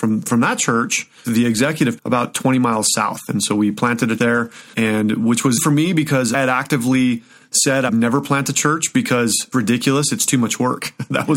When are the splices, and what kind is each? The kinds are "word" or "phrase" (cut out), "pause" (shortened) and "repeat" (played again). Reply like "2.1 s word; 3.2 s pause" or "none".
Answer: 1.2 s word; 2.0 s word; 4.2 s word; 4.7 s word; 5.6 s word; 6.3 s word; 7.9 s word; 9.5 s word